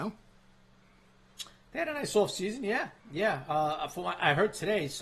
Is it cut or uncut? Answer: cut